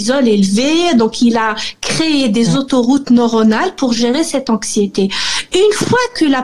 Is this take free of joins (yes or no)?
yes